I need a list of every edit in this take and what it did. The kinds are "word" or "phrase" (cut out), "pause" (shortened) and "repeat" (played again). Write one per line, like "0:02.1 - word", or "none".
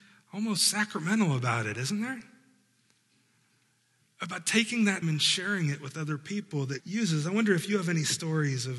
0:05.0 - word
0:06.8 - word